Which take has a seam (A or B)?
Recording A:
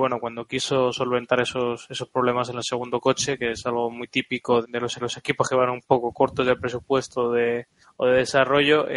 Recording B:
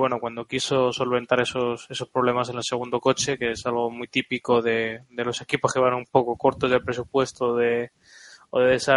A